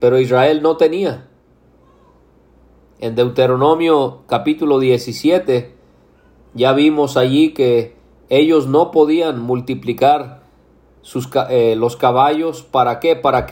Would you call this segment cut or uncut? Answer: uncut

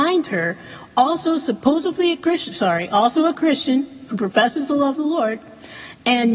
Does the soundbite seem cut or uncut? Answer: cut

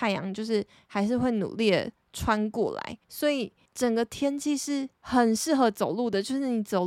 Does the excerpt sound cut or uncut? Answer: cut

